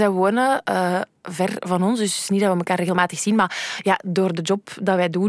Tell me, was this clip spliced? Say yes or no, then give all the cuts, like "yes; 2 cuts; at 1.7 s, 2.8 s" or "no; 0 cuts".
no; 0 cuts